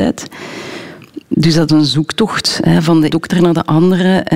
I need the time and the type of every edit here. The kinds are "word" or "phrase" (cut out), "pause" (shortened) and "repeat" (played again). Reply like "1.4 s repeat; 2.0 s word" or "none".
1.7 s word; 3.1 s word

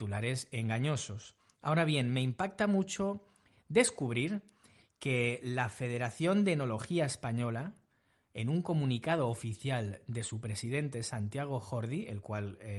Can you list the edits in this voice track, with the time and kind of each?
none

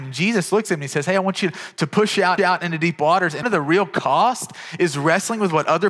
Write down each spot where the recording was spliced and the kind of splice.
2.4 s repeat; 3.4 s word

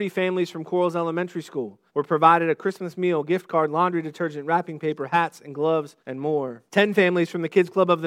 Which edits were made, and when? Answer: 1.9 s pause; 6.0 s pause; 6.7 s pause

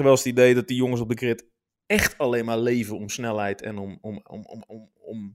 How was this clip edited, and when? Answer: none

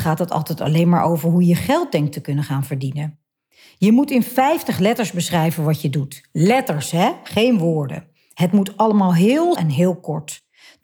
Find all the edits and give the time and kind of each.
9.6 s word

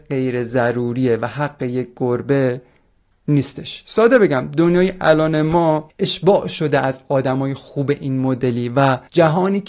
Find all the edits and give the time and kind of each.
none

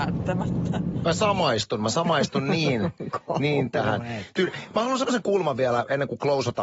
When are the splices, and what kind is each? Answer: none

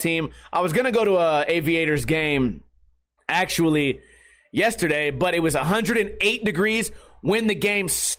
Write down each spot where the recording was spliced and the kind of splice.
none

